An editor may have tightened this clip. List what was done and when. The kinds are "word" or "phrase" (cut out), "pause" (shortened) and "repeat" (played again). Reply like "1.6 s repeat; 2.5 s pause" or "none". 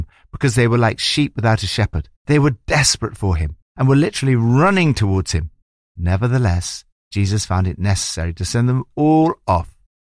2.2 s pause